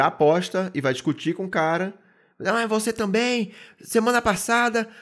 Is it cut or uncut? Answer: uncut